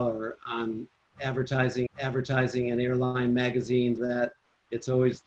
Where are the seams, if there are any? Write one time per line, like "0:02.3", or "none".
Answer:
0:01.9
0:04.0